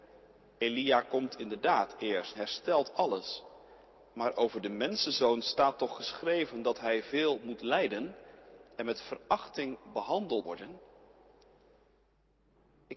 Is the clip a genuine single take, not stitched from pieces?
no; 2 cuts; at 2.3 s, 10.4 s

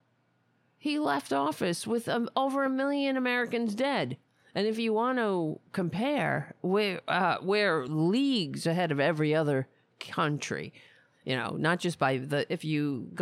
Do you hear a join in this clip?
no; 0 cuts

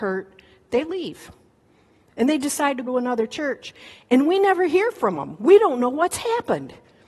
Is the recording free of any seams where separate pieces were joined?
no; 1 cut; at 2.9 s

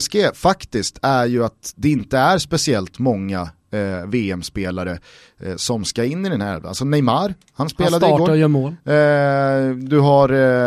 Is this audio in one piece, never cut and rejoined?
yes; 0 cuts

